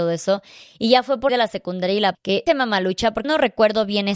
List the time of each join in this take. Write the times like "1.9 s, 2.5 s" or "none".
1.3 s, 2.1 s, 2.5 s, 3.2 s